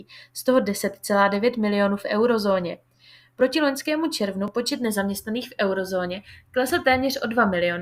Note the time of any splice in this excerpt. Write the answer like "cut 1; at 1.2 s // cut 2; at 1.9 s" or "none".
none